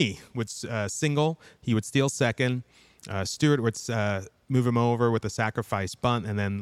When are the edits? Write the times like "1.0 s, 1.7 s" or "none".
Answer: none